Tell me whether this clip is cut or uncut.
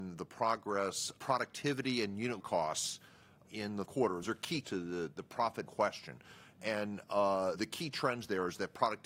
cut